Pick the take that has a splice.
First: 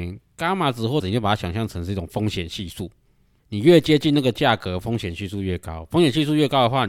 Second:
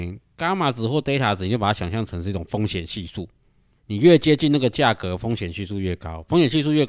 first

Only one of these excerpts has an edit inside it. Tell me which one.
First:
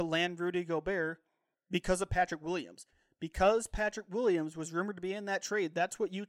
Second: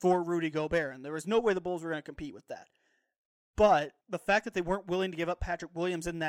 second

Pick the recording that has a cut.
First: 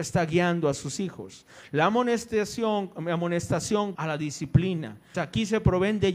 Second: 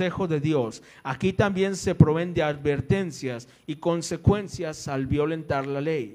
first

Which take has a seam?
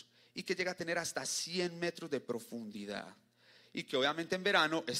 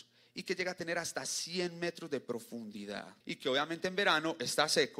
second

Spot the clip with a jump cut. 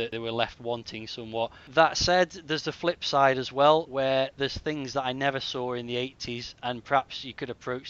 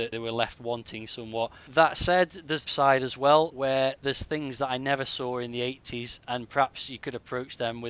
second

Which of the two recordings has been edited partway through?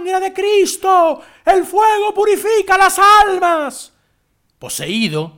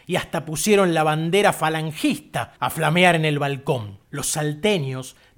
second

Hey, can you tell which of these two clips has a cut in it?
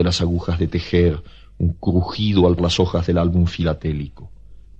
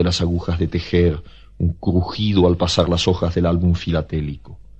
first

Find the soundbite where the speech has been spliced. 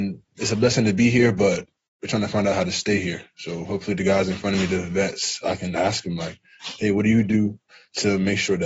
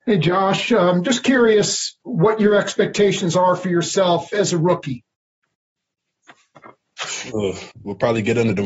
second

